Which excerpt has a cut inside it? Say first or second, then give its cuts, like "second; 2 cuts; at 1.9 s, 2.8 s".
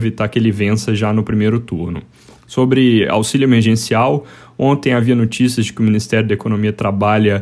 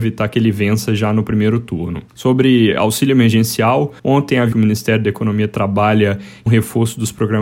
second; 4 cuts; at 2.1 s, 4.0 s, 4.5 s, 6.5 s